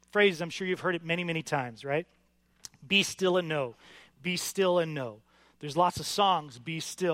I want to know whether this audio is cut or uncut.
uncut